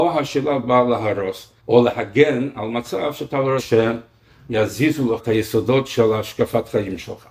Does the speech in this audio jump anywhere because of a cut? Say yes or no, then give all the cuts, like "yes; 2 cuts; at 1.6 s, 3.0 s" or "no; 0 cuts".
yes; 3 cuts; at 1.6 s, 3.6 s, 5.2 s